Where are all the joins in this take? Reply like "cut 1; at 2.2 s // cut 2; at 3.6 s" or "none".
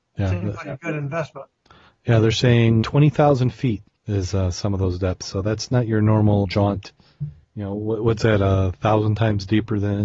cut 1; at 2.8 s // cut 2; at 3.9 s // cut 3; at 6.4 s